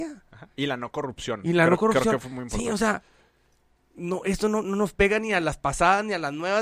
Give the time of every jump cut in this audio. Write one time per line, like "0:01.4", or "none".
none